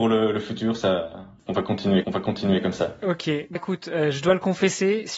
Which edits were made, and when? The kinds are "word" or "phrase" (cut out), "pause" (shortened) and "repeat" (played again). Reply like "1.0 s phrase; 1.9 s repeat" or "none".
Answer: 2.0 s repeat; 3.5 s word